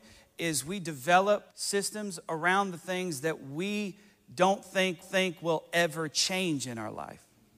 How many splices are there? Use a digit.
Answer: 2